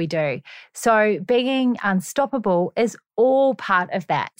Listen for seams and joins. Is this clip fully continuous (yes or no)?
yes